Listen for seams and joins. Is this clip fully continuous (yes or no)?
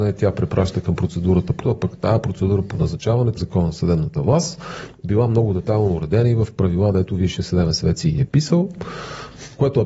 no